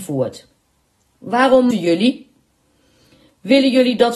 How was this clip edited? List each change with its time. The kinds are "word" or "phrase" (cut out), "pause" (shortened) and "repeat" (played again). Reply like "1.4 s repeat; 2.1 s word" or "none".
1.7 s word